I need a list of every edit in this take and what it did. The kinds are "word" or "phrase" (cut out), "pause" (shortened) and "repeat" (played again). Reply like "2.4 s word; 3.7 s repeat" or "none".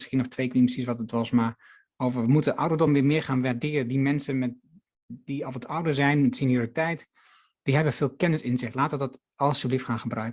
none